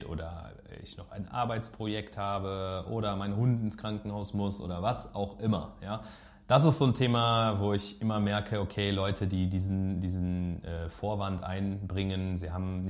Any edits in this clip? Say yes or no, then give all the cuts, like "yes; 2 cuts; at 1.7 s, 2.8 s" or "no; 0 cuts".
no; 0 cuts